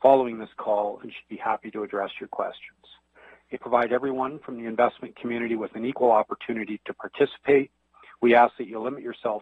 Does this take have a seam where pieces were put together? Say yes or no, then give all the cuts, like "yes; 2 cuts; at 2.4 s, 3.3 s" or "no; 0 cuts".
yes; 1 cut; at 3.5 s